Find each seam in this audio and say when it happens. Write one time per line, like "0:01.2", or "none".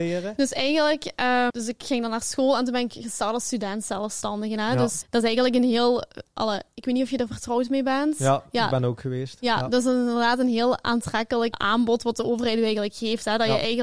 0:01.5
0:05.0
0:11.5